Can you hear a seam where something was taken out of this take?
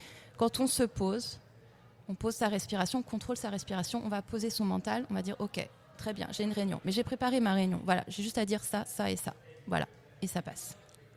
yes; 1 cut; at 8.9 s

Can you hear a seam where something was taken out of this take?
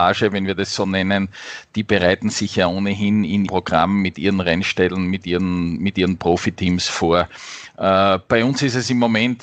yes; 1 cut; at 3.5 s

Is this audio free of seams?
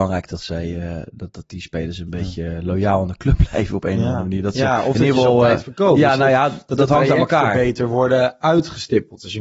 yes; 0 cuts

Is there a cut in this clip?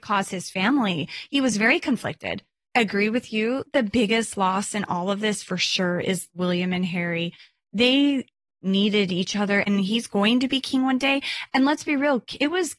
no; 0 cuts

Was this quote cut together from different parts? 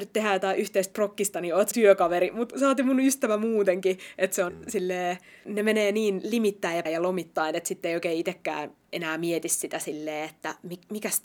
yes; 4 cuts; at 1.7 s, 2.5 s, 4.5 s, 6.9 s

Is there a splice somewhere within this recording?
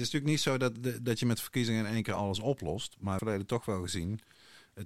yes; 1 cut; at 3.2 s

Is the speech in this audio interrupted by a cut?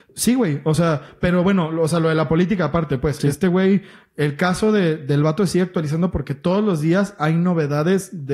no; 0 cuts

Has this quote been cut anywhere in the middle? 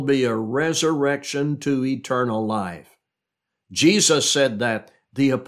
no; 0 cuts

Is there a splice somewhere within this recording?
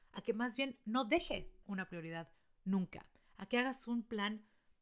yes; 1 cut; at 1.6 s

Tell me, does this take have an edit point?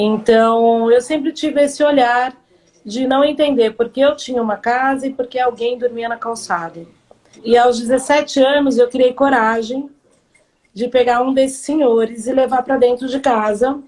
no; 0 cuts

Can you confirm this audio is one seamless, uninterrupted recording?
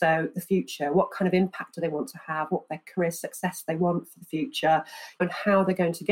yes; 0 cuts

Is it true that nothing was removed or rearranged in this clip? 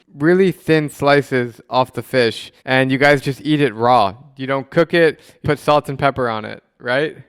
no; 2 cuts; at 2.6 s, 5.4 s

